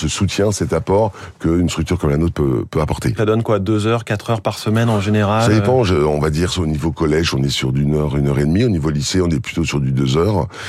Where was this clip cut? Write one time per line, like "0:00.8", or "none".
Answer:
0:03.2